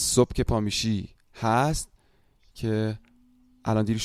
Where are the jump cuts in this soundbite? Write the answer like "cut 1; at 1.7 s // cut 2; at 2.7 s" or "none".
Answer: none